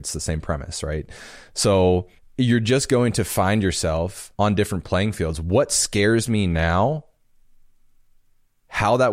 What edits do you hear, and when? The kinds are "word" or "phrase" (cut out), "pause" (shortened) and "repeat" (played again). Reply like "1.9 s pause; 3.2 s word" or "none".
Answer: 2.2 s pause; 4.4 s pause